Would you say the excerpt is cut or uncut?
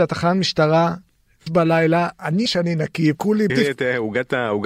cut